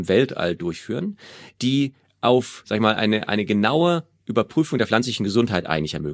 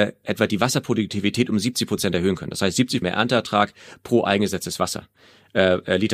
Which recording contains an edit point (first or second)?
second